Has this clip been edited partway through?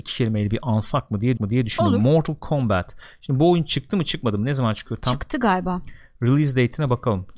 yes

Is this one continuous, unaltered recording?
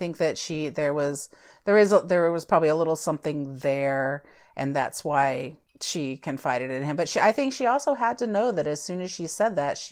yes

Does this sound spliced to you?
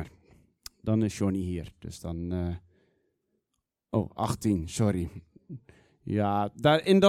no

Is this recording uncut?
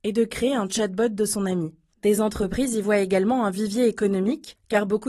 yes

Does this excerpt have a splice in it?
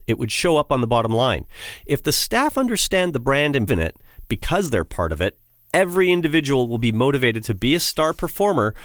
yes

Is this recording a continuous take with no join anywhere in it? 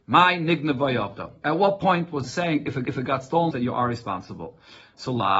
no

